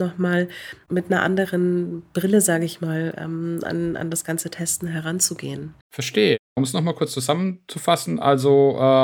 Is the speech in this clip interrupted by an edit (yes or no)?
yes